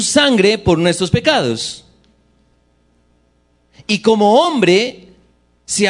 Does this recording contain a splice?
no; 0 cuts

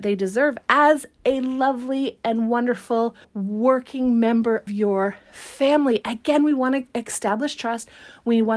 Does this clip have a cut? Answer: yes; 2 cuts; at 3.2 s, 4.7 s

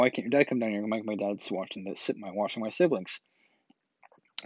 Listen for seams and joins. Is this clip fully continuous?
yes; 0 cuts

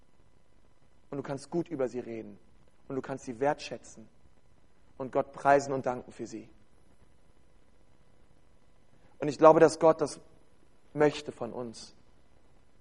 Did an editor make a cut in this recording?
no; 0 cuts

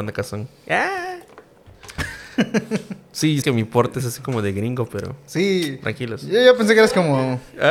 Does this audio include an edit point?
yes; 1 cut; at 3.4 s

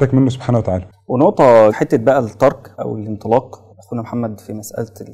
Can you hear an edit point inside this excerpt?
yes; 3 cuts; at 1.7 s, 2.7 s, 3.7 s

